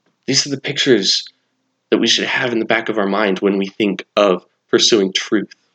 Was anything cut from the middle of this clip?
no; 0 cuts

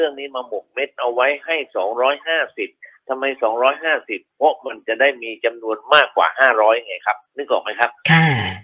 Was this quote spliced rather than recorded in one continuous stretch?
yes; 1 cut; at 7.3 s

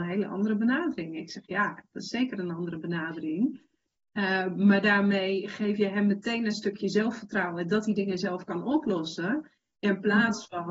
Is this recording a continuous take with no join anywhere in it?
yes; 0 cuts

